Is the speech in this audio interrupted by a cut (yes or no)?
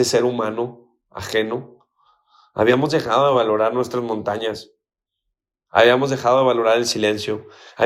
no